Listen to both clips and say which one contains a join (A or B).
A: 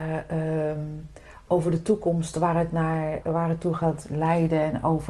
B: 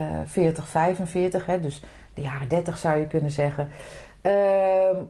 A